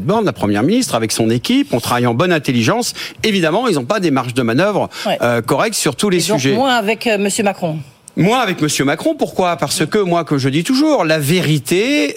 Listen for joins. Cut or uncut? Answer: uncut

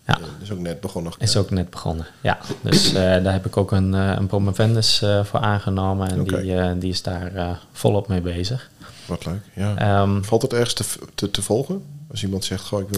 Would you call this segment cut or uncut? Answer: cut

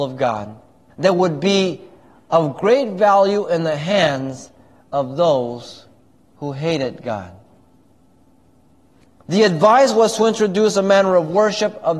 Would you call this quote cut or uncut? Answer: uncut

